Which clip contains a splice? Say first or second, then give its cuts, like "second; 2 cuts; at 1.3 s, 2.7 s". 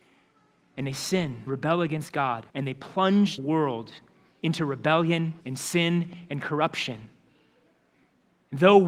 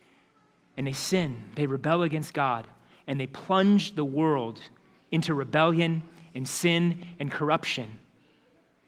first; 4 cuts; at 1.5 s, 2.5 s, 3.4 s, 5.4 s